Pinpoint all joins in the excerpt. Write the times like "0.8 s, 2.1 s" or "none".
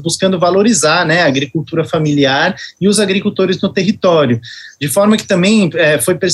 none